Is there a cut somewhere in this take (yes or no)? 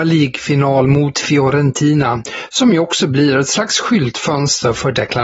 no